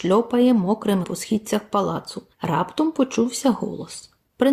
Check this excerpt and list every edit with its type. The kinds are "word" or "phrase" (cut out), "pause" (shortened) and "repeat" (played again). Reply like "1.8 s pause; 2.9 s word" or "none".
1.0 s word; 2.3 s pause